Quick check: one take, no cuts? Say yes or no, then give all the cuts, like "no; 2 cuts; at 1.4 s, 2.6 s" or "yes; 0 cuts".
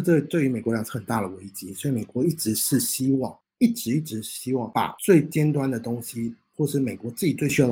yes; 0 cuts